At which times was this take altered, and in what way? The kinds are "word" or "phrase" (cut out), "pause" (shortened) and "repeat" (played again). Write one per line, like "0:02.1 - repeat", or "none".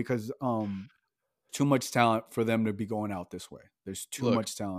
0:01.5 - word